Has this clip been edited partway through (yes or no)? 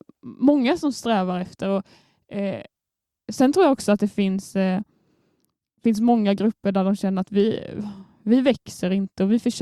no